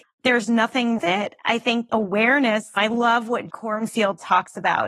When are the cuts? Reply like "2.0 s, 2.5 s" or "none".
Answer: 1.0 s, 1.9 s, 3.5 s